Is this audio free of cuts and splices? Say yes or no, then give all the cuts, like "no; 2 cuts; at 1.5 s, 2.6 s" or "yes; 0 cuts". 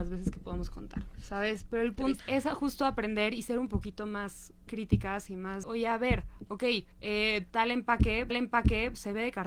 no; 5 cuts; at 2.2 s, 4.6 s, 5.6 s, 6.9 s, 8.3 s